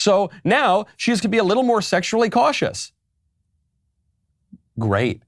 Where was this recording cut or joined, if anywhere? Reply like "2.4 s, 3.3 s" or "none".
1.2 s